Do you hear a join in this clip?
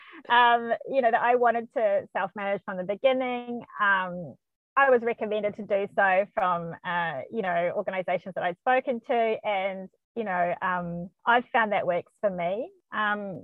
yes; 1 cut; at 4.5 s

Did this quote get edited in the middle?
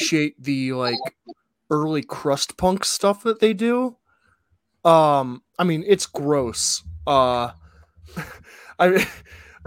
no; 0 cuts

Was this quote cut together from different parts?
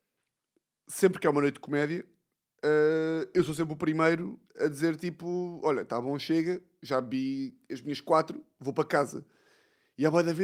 no; 0 cuts

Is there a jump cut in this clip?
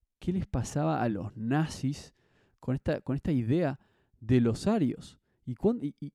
no; 0 cuts

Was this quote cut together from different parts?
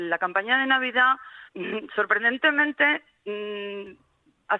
yes; 1 cut; at 1.5 s

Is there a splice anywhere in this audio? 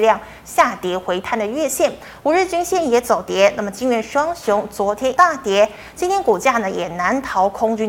yes; 1 cut; at 5.2 s

